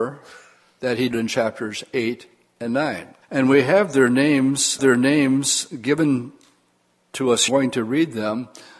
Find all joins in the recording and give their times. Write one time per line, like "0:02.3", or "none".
0:01.1
0:03.2
0:04.8
0:07.5